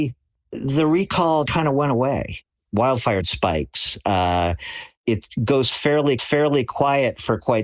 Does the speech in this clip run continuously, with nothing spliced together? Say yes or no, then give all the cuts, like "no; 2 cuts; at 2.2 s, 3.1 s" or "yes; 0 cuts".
no; 3 cuts; at 1.5 s, 3.2 s, 6.2 s